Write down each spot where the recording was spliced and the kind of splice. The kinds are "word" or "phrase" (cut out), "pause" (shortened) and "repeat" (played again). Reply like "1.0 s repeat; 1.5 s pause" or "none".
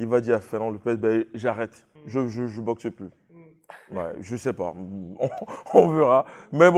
2.0 s pause